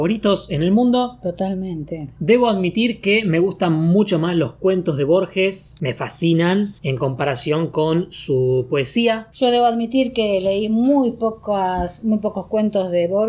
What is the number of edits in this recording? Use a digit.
0